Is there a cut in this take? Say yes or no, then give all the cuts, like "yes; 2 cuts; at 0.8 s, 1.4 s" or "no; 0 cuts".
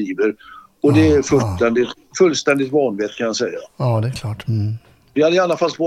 no; 0 cuts